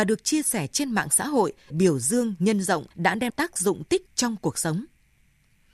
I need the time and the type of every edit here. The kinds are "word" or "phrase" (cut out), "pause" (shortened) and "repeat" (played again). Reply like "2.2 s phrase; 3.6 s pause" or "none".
1.7 s word; 2.9 s pause; 3.3 s word; 4.1 s word